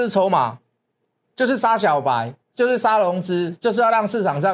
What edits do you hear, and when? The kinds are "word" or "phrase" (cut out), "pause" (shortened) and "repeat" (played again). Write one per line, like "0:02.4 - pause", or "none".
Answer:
0:02.4 - pause